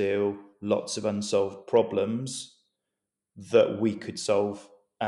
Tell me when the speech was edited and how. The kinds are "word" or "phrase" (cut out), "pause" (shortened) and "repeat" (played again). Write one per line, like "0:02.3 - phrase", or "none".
none